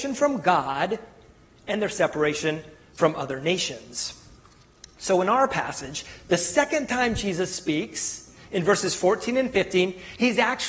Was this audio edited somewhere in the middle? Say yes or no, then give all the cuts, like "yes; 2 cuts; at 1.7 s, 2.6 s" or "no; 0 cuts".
no; 0 cuts